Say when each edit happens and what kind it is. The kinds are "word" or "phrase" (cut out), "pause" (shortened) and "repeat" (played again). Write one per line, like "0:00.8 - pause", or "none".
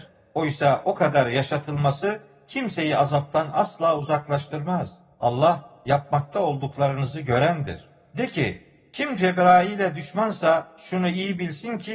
none